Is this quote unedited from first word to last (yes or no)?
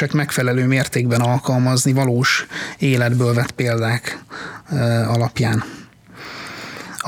yes